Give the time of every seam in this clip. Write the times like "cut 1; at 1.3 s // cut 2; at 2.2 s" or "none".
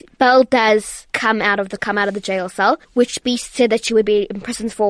cut 1; at 1.1 s // cut 2; at 1.8 s // cut 3; at 2.8 s